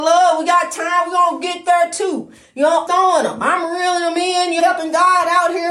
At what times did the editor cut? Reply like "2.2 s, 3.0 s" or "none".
2.9 s, 4.6 s